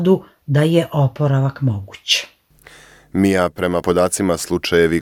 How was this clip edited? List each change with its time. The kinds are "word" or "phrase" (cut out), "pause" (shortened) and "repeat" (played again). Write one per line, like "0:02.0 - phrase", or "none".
0:03.8 - word